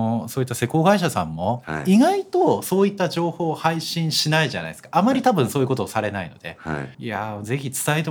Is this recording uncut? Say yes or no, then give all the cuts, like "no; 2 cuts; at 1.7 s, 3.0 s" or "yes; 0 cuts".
no; 1 cut; at 6.9 s